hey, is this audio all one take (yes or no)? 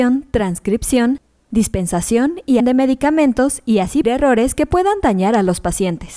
no